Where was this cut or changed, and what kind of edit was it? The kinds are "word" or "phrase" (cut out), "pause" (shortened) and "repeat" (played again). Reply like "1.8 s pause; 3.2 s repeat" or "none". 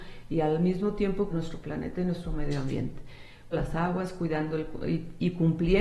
1.3 s word; 3.5 s word